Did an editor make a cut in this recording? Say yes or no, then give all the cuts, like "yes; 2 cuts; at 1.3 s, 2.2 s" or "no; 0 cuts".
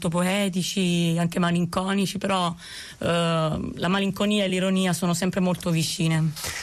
no; 0 cuts